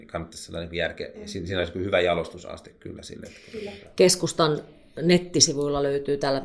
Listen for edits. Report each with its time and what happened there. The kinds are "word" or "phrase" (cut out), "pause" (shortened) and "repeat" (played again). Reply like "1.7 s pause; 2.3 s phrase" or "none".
none